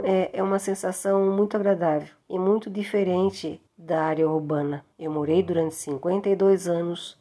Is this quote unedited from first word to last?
no; 3 cuts; at 2.2 s, 3.7 s, 4.9 s

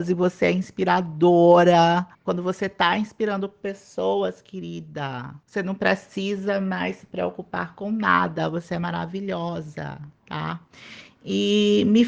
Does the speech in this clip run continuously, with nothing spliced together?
no; 3 cuts; at 2.1 s, 5.4 s, 10.2 s

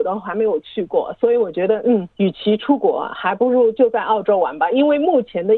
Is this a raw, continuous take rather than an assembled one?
no; 1 cut; at 2.1 s

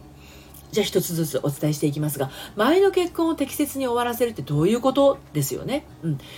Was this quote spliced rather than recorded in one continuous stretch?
no; 0 cuts

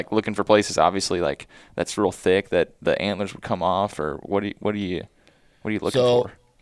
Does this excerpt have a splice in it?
no; 0 cuts

